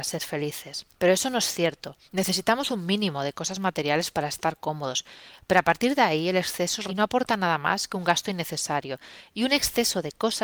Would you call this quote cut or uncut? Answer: cut